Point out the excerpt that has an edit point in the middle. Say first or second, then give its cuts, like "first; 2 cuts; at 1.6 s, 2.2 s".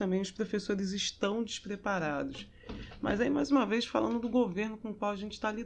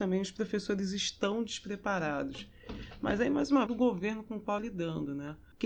second; 2 cuts; at 3.7 s, 4.6 s